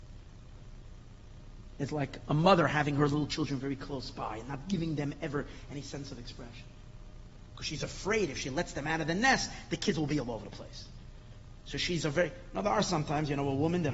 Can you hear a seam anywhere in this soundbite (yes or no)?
no